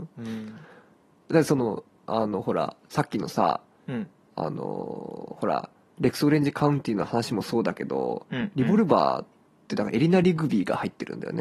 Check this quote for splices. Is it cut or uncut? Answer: uncut